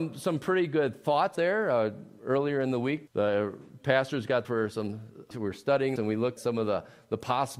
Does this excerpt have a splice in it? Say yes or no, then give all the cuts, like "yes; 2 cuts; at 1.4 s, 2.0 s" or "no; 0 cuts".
yes; 6 cuts; at 1.3 s, 3.1 s, 4.4 s, 5.3 s, 6.0 s, 6.4 s